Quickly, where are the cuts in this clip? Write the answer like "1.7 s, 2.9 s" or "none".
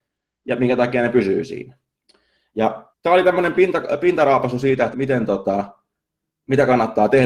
2.9 s, 4.9 s